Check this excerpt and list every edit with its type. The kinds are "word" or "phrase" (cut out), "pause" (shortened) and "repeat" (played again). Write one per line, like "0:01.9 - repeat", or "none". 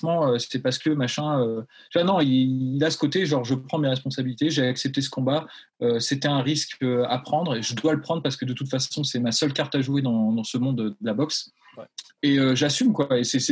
none